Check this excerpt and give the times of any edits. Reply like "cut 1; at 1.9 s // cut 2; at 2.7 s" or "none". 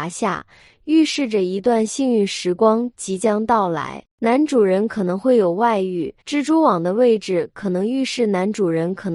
cut 1; at 6.2 s